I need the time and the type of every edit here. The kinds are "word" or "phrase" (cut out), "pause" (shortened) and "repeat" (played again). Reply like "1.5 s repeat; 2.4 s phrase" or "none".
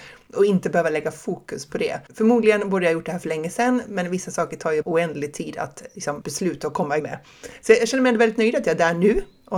2.1 s pause; 4.8 s word; 6.2 s phrase; 7.0 s word